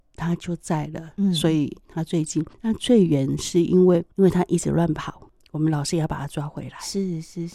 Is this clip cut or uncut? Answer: cut